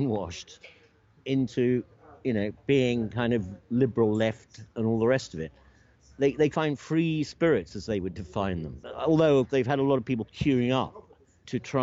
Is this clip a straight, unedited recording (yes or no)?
no